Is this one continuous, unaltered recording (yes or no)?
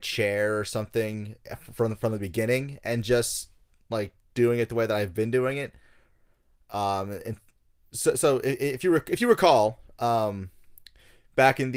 yes